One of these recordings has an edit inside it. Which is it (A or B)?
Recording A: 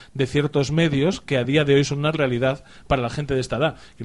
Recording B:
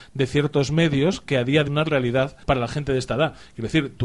B